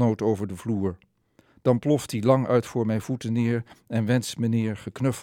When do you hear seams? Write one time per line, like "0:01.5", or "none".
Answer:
none

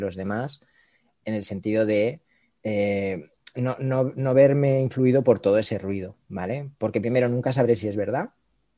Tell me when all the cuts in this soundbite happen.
none

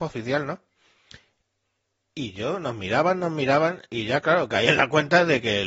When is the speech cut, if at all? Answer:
none

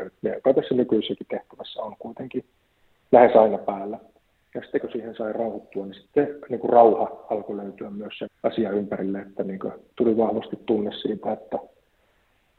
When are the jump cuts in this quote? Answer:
0:04.8
0:08.3

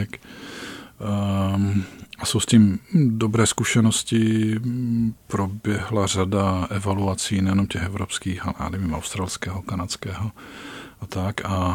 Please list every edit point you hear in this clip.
0:05.2

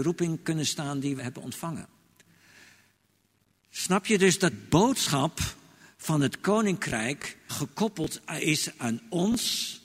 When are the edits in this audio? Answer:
0:01.2
0:04.5
0:07.5

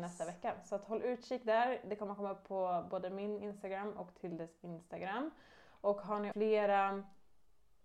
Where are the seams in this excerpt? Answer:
0:06.3

